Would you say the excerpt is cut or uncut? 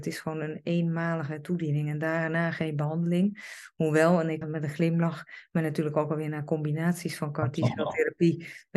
cut